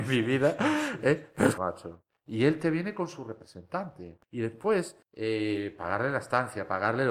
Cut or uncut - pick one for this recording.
cut